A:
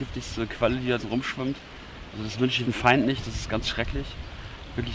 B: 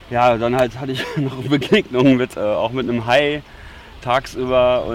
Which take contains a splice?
A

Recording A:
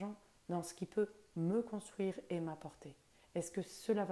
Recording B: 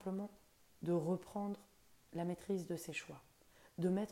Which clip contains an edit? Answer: B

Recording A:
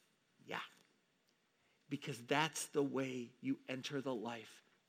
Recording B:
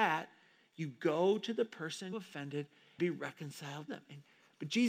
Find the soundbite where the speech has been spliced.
B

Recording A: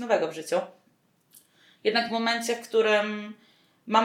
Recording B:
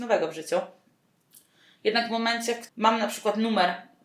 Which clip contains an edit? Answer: B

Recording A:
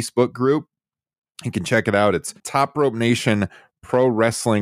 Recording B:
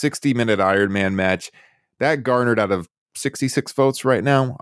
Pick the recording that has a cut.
A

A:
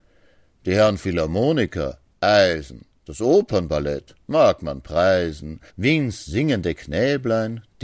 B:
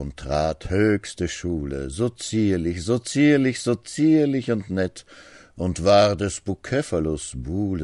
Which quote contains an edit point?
A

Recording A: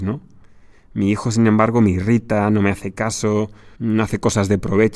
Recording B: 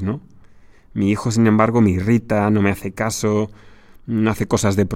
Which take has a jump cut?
A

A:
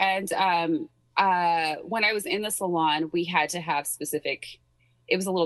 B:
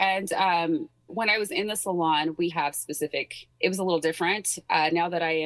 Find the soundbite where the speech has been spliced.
B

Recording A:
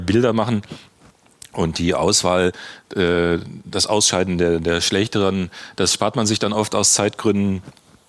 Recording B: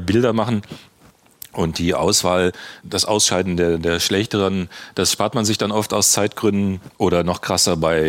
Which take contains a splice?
B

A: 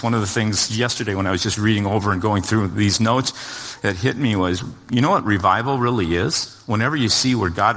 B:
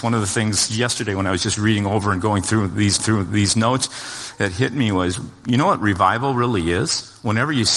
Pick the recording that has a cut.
B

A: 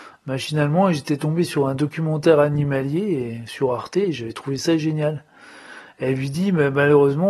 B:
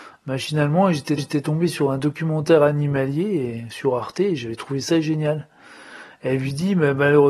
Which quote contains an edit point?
B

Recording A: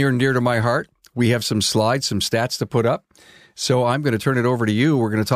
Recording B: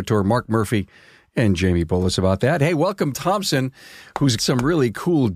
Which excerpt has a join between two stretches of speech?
B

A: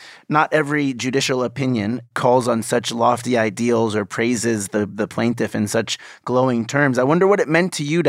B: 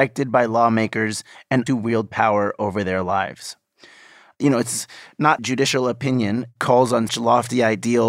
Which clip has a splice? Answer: B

